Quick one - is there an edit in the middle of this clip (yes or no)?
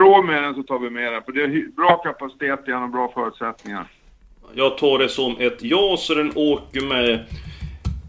no